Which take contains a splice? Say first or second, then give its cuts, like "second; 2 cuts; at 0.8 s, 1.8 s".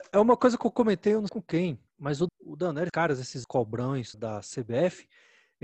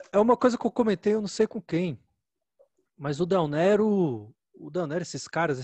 first; 6 cuts; at 1.3 s, 1.9 s, 2.3 s, 2.9 s, 3.4 s, 4.1 s